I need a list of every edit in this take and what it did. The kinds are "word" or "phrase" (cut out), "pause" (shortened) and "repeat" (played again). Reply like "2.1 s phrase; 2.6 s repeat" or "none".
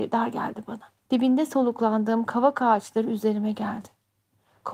1.0 s pause